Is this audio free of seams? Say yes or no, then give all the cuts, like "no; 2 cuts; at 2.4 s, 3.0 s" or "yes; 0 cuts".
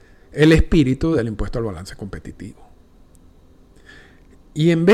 yes; 0 cuts